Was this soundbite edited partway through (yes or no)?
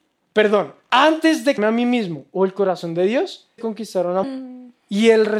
yes